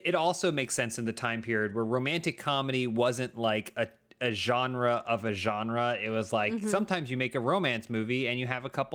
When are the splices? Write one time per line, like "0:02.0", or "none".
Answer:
none